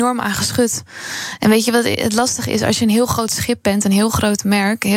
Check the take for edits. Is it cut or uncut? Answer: uncut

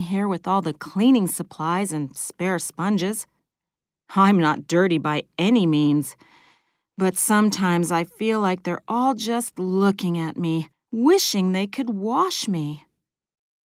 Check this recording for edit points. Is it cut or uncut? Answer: cut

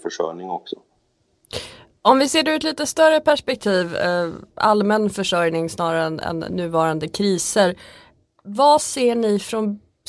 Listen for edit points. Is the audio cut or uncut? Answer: uncut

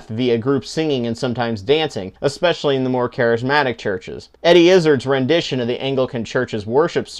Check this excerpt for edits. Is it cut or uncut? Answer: cut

